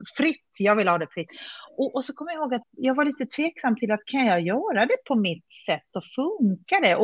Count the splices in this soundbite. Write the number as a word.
one